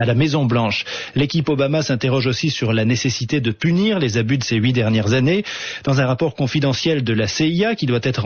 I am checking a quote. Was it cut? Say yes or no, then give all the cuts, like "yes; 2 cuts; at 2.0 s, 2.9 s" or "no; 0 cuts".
no; 0 cuts